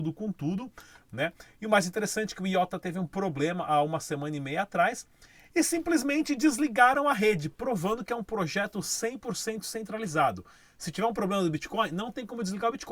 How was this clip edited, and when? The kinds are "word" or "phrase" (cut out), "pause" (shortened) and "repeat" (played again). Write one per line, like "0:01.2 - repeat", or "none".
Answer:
none